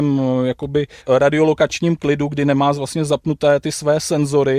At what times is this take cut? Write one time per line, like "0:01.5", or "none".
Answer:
0:01.0